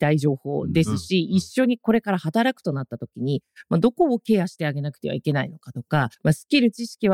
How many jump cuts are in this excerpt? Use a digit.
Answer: 1